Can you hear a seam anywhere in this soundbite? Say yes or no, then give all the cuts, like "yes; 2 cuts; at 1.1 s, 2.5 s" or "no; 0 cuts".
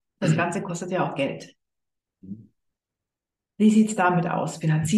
no; 0 cuts